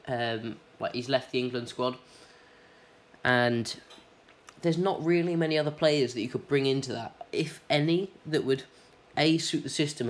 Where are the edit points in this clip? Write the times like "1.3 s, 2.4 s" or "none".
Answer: none

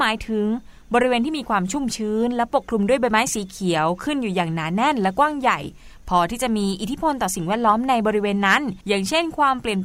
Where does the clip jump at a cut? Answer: 8.8 s

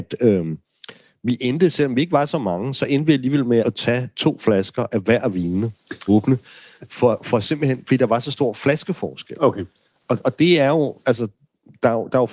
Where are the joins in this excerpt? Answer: 3.6 s, 4.9 s, 6.1 s

